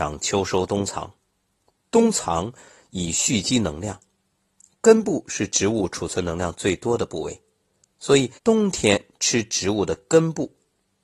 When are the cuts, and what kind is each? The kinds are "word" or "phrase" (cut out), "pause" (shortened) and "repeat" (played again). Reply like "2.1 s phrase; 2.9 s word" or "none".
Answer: 8.4 s pause